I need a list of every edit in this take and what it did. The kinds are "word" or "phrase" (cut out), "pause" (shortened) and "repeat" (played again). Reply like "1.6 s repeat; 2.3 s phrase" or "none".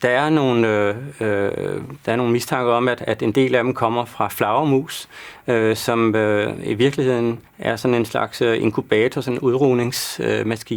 7.5 s pause